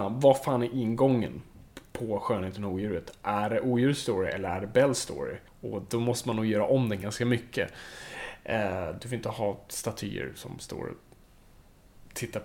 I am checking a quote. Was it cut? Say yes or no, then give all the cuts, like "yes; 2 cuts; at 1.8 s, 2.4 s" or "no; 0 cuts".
yes; 1 cut; at 5.5 s